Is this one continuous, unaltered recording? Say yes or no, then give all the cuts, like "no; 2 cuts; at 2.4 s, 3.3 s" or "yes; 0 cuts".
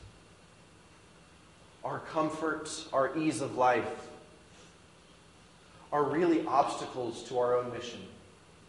yes; 0 cuts